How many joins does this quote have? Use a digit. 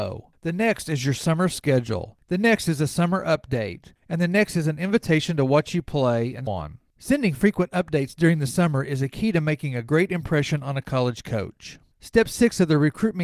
2